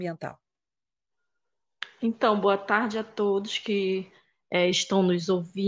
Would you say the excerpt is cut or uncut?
uncut